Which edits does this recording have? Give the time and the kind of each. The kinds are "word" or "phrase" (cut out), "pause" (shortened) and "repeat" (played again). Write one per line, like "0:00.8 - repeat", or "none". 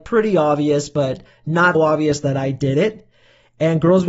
0:01.7 - word